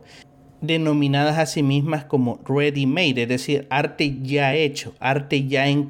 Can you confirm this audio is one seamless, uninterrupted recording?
yes; 0 cuts

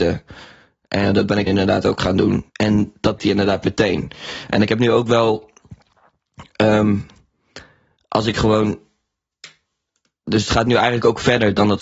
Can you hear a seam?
yes; 4 cuts; at 1.1 s, 1.5 s, 2.5 s, 3.2 s

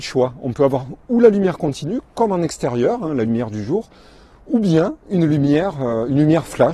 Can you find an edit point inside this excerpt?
no; 0 cuts

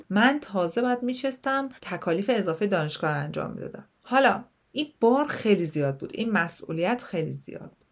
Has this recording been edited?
yes; 1 cut; at 1.8 s

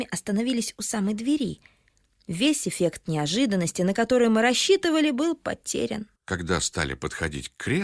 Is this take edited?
yes; 1 cut; at 6.2 s

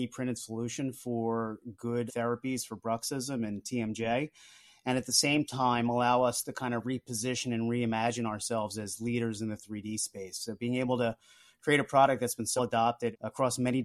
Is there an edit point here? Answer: yes; 2 cuts; at 2.1 s, 12.6 s

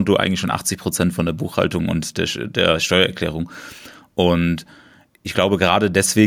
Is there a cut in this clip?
no; 0 cuts

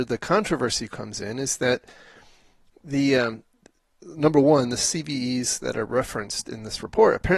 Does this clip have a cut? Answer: no; 0 cuts

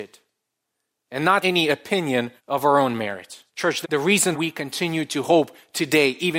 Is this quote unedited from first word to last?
no; 5 cuts; at 1.4 s, 2.4 s, 3.5 s, 3.8 s, 4.3 s

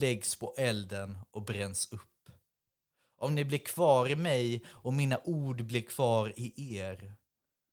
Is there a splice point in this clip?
no; 0 cuts

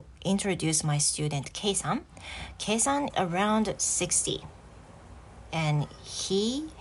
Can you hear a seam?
yes; 1 cut; at 3.1 s

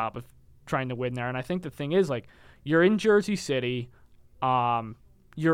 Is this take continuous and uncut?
yes; 0 cuts

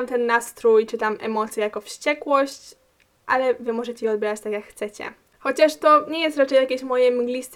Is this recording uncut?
yes; 0 cuts

